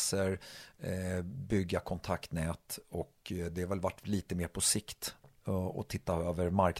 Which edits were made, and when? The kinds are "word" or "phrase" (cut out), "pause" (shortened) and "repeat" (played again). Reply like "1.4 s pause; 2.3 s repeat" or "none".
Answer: none

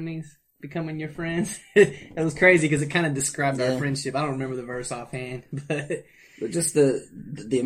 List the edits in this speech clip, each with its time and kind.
none

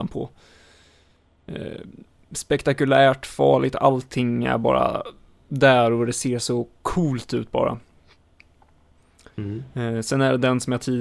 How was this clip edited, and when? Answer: none

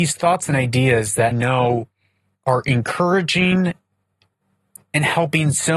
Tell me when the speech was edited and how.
1.3 s word

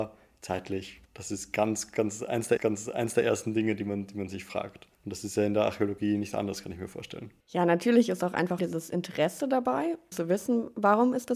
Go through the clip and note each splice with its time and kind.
1.0 s pause; 2.6 s repeat; 4.9 s pause; 7.4 s pause; 8.6 s phrase; 10.1 s word

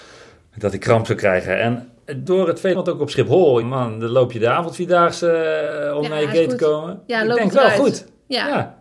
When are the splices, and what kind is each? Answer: 2.3 s word; 2.7 s word; 3.6 s word

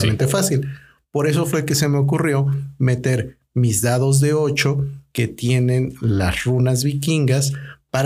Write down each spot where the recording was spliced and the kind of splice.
none

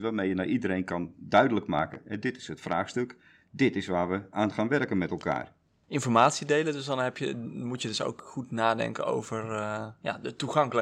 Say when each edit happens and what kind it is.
none

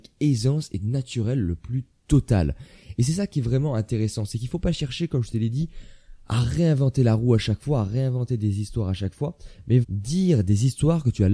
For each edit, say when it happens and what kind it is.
9.8 s word

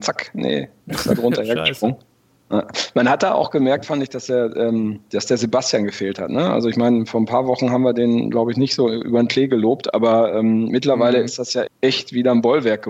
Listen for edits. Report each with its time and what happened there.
11.7 s word

